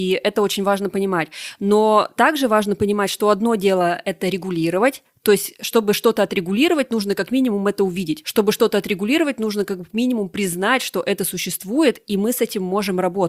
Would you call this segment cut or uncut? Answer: uncut